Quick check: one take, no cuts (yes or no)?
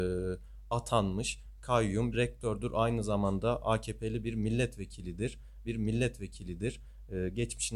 no